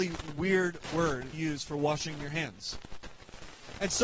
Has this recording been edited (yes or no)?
yes